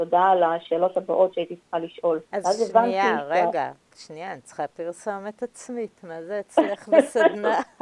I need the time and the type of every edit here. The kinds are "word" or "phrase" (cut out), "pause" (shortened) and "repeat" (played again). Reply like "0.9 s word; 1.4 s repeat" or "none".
2.3 s pause